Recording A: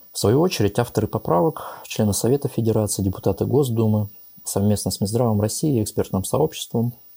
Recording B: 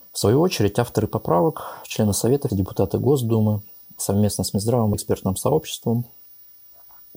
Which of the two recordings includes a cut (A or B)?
B